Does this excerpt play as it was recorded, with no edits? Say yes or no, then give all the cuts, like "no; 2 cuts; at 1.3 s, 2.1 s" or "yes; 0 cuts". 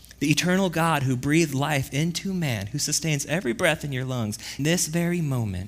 no; 1 cut; at 4.6 s